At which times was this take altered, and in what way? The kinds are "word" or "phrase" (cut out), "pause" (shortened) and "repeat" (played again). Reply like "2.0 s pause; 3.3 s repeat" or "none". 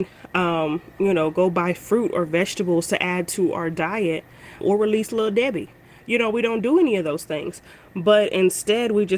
4.6 s word